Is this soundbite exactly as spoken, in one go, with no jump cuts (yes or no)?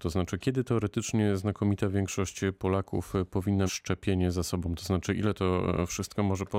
no